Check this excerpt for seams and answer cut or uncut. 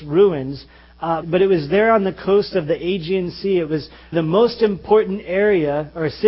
cut